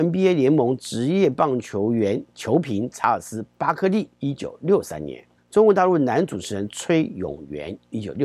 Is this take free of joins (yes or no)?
no